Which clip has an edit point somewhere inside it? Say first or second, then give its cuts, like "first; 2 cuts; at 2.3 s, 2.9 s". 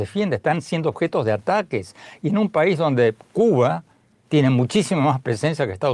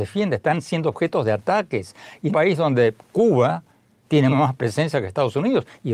second; 2 cuts; at 2.3 s, 4.3 s